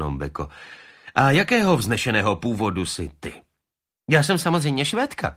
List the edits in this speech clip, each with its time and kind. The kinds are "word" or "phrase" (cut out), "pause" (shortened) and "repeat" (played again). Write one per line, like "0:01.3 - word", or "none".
none